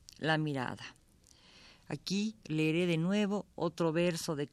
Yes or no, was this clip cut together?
no